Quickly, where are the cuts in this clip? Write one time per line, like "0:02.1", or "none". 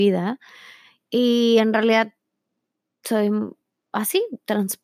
none